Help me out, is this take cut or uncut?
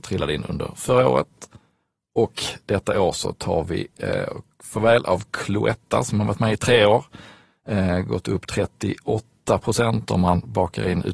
uncut